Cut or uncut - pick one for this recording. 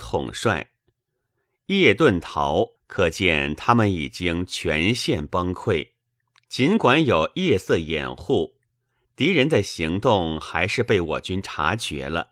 cut